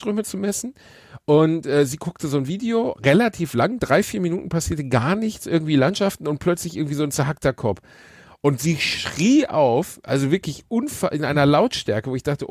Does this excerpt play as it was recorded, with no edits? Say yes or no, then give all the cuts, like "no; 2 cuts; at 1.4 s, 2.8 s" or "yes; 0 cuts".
yes; 0 cuts